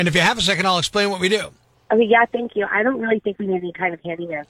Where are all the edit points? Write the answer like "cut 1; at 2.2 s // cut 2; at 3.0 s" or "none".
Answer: cut 1; at 1.7 s